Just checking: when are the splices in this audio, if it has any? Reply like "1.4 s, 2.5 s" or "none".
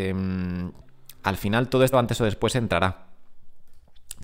1.9 s